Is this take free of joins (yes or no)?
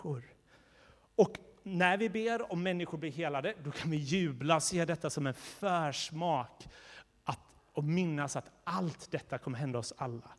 yes